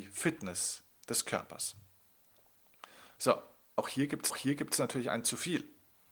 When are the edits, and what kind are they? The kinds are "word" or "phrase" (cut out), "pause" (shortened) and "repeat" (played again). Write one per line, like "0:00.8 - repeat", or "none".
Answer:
0:03.8 - word
0:04.3 - repeat